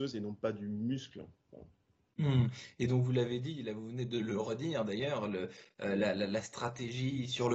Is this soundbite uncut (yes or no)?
yes